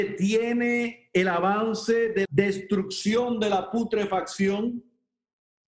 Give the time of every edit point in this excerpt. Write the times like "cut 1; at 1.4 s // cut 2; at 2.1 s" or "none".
cut 1; at 2.2 s